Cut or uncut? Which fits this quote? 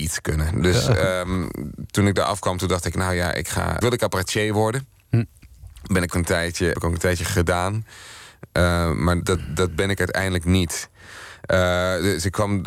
cut